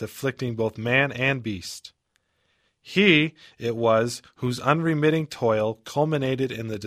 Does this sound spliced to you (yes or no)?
no